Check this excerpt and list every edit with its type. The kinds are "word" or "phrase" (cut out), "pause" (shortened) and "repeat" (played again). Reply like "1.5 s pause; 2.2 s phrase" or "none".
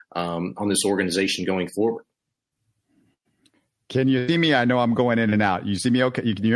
none

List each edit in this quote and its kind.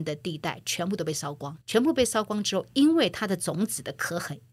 1.6 s pause

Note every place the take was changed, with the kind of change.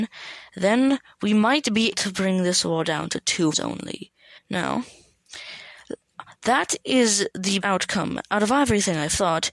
1.9 s word; 3.5 s word; 4.4 s pause; 7.6 s word

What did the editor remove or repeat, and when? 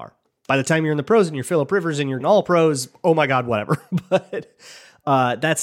2.2 s word

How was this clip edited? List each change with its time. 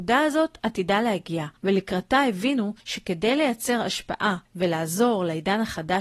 1.6 s pause; 2.8 s pause; 4.5 s pause

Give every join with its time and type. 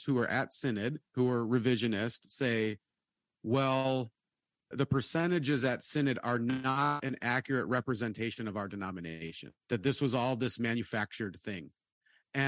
1.1 s pause; 4.7 s word; 9.6 s pause

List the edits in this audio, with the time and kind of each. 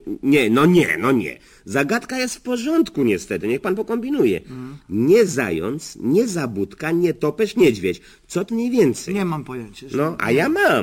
8.5 s word

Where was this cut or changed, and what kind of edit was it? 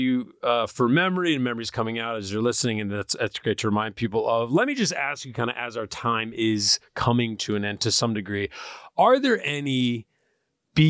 none

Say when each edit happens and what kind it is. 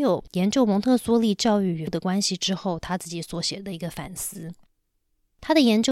1.9 s word

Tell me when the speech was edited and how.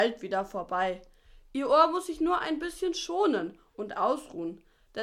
none

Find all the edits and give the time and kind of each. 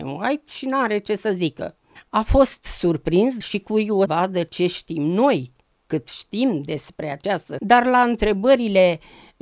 2.0 s pause; 3.4 s word; 4.1 s word; 7.6 s word

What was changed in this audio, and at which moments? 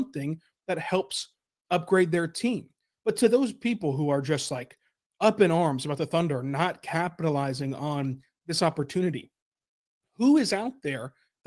none

